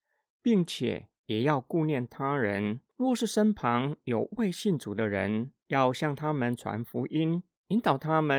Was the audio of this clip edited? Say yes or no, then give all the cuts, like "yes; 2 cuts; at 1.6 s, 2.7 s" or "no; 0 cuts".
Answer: yes; 1 cut; at 2.9 s